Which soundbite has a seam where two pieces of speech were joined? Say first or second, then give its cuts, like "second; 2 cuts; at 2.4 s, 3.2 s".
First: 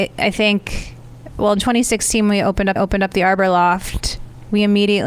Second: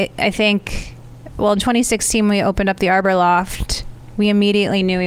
first; 1 cut; at 2.8 s